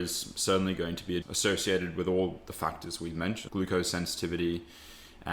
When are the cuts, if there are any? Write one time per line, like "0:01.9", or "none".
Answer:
0:01.2
0:03.5